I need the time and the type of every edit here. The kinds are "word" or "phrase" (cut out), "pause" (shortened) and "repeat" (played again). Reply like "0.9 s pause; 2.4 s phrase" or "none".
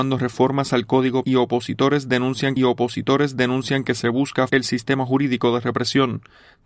1.2 s word; 2.6 s repeat; 4.5 s word